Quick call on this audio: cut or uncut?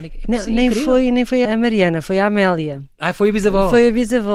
cut